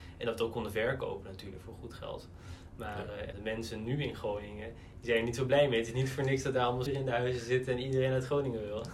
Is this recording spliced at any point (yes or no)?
yes